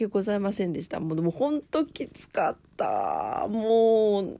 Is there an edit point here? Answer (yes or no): yes